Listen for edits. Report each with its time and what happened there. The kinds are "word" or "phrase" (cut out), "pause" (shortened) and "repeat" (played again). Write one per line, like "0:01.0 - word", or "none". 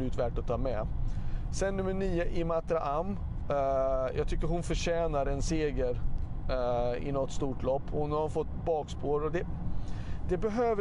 none